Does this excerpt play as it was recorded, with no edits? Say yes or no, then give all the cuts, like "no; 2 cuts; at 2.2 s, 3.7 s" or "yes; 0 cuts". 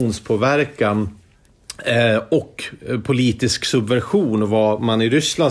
yes; 0 cuts